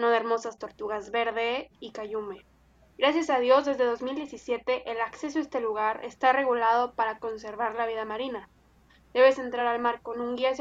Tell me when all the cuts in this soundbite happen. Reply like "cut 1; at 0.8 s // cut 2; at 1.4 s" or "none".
none